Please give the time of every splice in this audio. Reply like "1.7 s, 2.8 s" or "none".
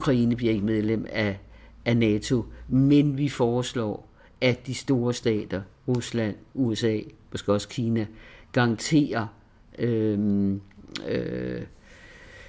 none